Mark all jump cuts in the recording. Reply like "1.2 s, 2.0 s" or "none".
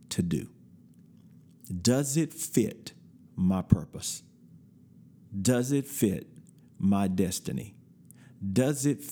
none